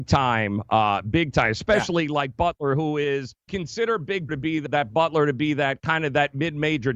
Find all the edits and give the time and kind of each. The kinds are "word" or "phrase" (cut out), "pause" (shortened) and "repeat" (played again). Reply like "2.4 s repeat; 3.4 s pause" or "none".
3.5 s word; 4.3 s word; 4.7 s word